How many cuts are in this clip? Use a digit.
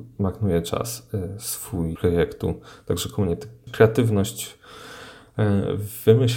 2